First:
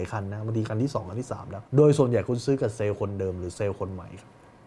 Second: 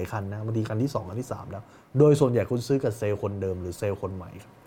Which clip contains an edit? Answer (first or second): first